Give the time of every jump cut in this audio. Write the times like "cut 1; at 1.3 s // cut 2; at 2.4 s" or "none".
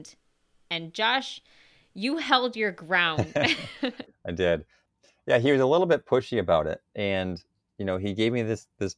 none